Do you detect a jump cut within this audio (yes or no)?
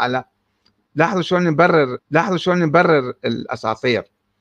yes